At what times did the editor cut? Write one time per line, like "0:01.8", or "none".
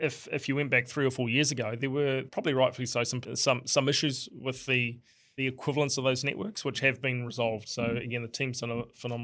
none